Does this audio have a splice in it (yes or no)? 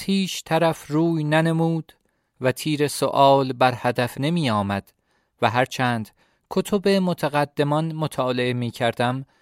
yes